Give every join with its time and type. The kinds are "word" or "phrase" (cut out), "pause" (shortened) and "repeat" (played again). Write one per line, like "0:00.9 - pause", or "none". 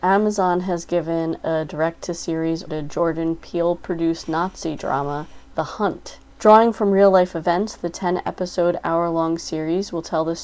0:02.7 - word